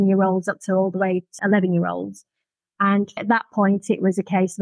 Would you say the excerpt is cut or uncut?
cut